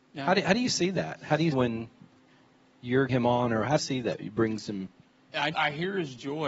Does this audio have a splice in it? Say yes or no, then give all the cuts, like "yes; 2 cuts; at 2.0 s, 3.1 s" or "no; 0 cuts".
yes; 4 cuts; at 1.5 s, 3.1 s, 3.8 s, 5.5 s